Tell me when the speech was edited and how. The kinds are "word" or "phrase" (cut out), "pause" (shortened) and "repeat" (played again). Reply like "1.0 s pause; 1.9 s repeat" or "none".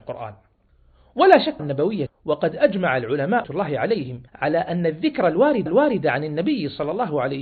1.6 s phrase; 2.1 s phrase; 3.4 s word; 4.3 s pause; 5.7 s repeat

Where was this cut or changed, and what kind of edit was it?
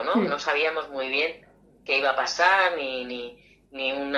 none

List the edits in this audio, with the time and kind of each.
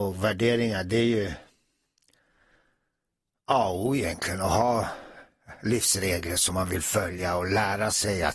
none

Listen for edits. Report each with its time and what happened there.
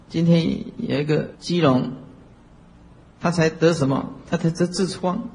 1.4 s pause

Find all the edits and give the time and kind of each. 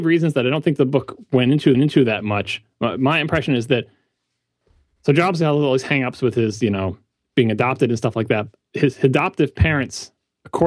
1.7 s repeat

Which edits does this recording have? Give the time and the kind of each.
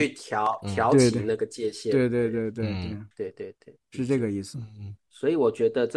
3.1 s pause; 3.8 s pause

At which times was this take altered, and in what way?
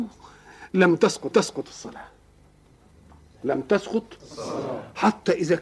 1.3 s repeat

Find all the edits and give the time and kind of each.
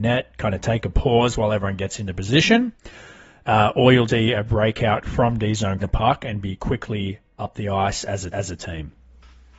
4.1 s word; 5.8 s phrase; 8.3 s repeat

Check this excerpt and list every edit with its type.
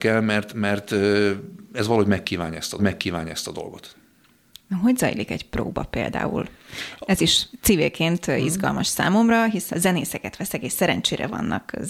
2.8 s repeat; 9.7 s phrase

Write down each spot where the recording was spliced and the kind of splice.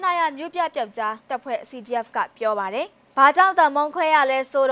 1.2 s pause

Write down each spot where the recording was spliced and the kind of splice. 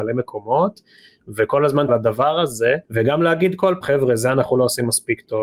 1.9 s phrase; 2.8 s pause; 3.8 s word

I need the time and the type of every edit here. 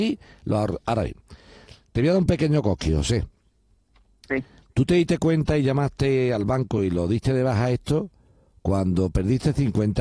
none

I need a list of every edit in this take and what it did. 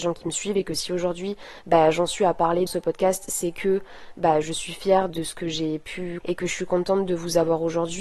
2.7 s word; 4.4 s word; 5.1 s word; 6.2 s word

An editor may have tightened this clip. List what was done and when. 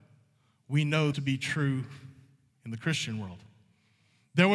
1.1 s word

